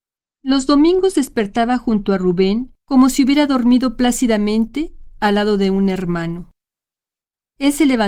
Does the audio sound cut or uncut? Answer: cut